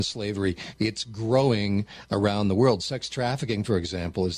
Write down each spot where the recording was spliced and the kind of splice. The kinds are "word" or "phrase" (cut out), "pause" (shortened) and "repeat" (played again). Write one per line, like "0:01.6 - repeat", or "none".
none

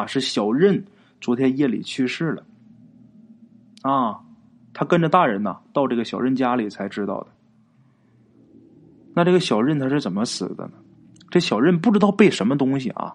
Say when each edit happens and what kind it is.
none

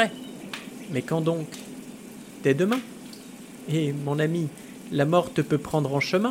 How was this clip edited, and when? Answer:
none

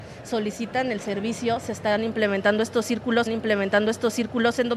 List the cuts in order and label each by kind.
0:03.3 - repeat

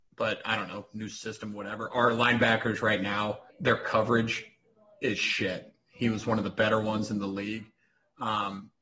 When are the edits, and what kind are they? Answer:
0:03.5 - pause

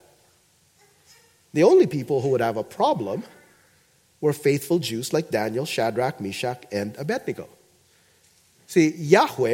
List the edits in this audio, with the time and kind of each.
none

